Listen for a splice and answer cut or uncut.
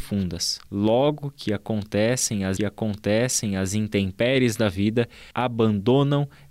cut